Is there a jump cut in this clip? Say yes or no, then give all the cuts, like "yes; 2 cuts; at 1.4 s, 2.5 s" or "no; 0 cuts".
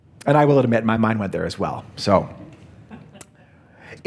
no; 0 cuts